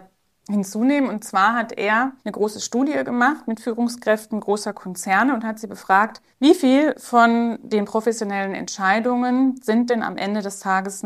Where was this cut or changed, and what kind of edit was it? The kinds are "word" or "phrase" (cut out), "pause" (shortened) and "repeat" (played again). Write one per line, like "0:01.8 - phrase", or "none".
0:02.2 - pause
0:06.3 - pause